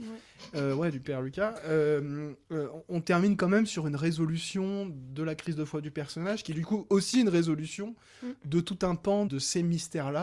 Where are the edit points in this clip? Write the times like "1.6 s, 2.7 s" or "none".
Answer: 9.3 s